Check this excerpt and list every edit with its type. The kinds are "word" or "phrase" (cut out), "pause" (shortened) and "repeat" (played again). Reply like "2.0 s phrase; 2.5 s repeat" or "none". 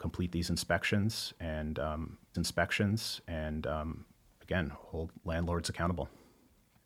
2.3 s repeat